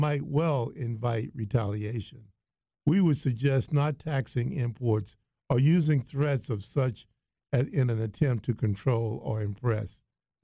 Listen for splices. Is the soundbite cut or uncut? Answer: uncut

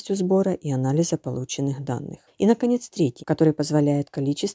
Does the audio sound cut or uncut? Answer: cut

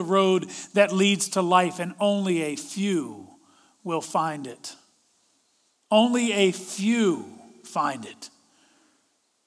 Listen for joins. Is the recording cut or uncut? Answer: uncut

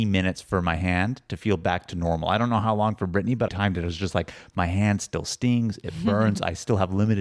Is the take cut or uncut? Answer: cut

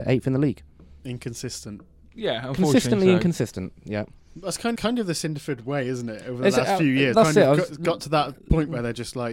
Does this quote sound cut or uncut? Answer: cut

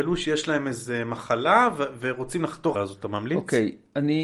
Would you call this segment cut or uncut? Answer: cut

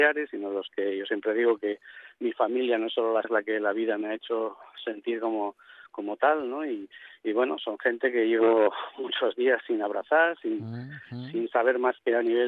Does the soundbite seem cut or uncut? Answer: cut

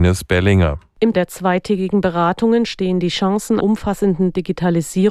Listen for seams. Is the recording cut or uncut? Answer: cut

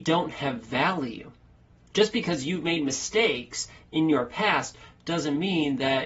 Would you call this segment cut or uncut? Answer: uncut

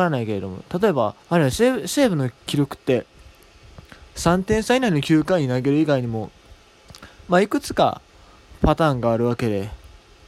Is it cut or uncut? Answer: cut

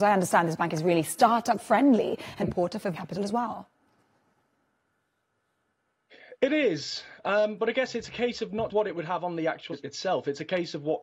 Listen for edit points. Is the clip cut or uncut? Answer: cut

